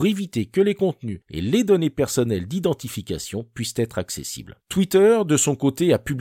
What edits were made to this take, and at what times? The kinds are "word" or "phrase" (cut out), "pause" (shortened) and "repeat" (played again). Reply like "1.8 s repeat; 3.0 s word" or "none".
none